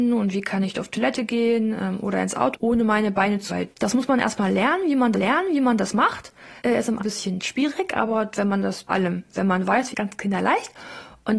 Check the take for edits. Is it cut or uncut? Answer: cut